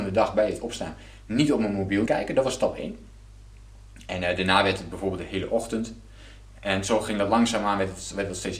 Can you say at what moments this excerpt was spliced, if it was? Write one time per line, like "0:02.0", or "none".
0:02.1